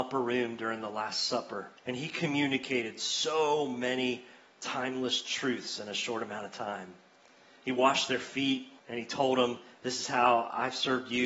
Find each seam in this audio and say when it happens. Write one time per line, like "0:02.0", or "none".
0:01.8
0:08.8